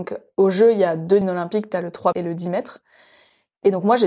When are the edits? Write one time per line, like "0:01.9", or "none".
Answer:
0:01.2
0:02.1